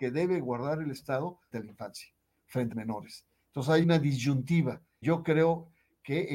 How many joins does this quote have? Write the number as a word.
four